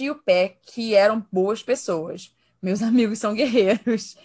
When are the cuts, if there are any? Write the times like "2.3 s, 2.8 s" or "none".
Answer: none